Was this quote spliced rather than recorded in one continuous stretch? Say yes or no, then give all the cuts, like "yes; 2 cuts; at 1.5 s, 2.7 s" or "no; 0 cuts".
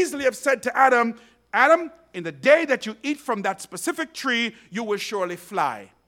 no; 0 cuts